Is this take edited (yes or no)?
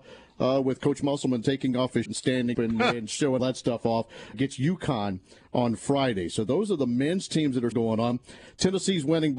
yes